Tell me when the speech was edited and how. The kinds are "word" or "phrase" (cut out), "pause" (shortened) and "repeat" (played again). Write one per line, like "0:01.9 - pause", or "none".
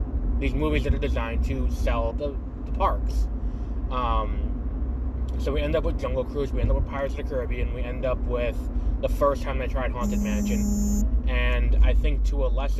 0:02.1 - word